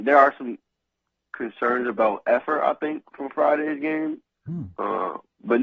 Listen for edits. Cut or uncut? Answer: uncut